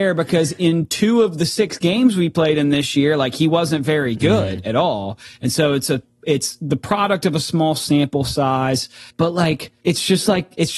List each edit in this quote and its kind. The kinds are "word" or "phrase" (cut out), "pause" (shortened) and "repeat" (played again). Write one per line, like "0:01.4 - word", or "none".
0:09.1 - pause
0:09.8 - pause